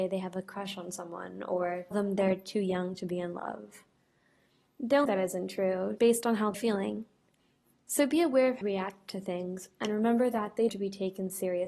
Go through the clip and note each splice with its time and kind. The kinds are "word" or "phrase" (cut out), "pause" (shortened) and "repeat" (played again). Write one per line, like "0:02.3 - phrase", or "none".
0:01.9 - word
0:05.1 - word
0:06.0 - word
0:06.5 - word
0:08.6 - word
0:10.7 - word